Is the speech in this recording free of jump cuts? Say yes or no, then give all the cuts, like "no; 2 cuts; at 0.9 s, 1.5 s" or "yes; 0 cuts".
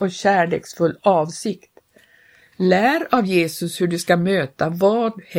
yes; 0 cuts